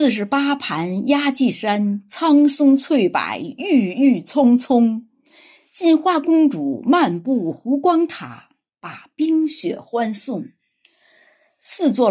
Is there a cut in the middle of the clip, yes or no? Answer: no